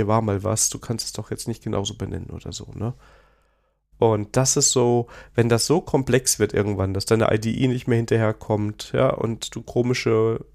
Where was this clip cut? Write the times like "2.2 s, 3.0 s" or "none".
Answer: none